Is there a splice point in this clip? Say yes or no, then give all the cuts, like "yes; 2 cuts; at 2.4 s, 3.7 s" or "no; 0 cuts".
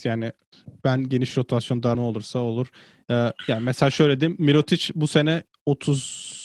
yes; 1 cut; at 1.9 s